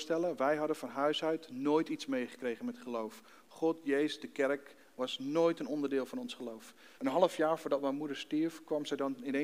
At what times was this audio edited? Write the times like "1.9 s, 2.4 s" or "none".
7.0 s

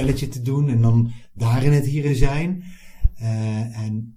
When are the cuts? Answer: 2.1 s

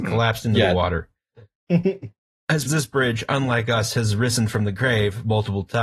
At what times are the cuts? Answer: 2.6 s

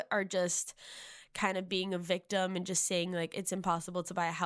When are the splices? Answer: none

